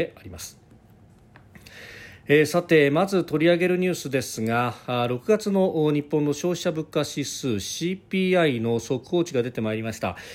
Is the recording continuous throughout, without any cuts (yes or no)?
yes